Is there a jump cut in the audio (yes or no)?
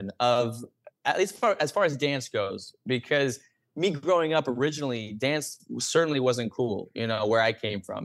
no